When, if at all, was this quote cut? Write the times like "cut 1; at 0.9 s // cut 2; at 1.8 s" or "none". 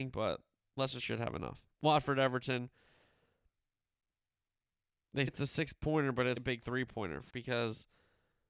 cut 1; at 1.0 s // cut 2; at 1.7 s // cut 3; at 5.3 s // cut 4; at 6.4 s // cut 5; at 7.3 s